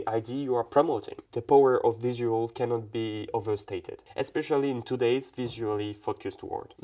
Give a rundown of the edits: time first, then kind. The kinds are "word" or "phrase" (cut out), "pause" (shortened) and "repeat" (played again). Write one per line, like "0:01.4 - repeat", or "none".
none